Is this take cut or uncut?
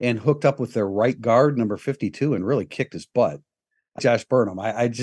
cut